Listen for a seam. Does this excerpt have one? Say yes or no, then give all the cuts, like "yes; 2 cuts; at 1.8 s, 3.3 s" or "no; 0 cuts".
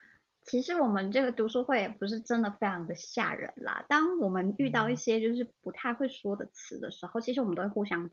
no; 0 cuts